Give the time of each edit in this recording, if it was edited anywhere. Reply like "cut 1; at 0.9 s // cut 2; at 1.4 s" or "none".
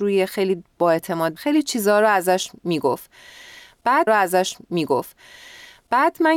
cut 1; at 1.4 s // cut 2; at 4.1 s